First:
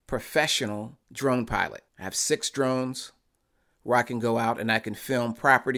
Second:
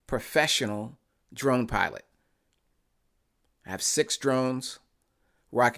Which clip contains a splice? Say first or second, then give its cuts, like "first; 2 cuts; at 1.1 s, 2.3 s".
first; 2 cuts; at 1.0 s, 1.9 s